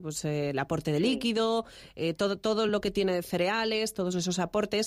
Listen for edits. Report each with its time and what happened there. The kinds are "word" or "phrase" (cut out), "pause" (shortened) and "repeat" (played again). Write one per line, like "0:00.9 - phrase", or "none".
none